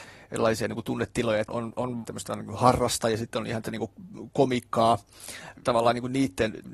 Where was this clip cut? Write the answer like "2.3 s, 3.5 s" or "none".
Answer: 1.5 s, 2.0 s, 3.6 s, 5.6 s